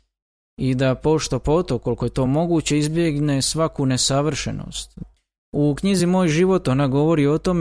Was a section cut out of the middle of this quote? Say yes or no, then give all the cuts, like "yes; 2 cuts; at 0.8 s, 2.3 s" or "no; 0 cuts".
no; 0 cuts